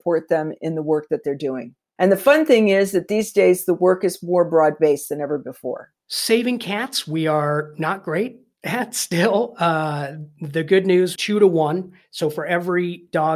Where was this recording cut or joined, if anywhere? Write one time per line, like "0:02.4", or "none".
0:11.2